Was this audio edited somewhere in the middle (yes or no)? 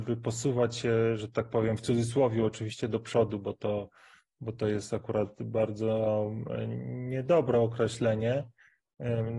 no